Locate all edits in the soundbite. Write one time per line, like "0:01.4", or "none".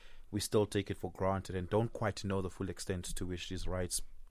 none